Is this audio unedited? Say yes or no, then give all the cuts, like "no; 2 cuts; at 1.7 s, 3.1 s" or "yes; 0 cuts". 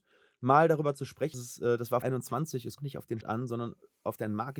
no; 4 cuts; at 1.3 s, 2.0 s, 2.8 s, 3.2 s